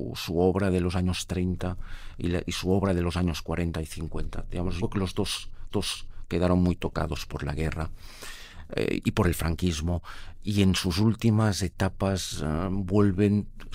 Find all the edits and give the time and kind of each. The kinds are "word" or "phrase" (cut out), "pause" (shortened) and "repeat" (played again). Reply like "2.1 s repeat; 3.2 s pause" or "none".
4.8 s word; 5.7 s repeat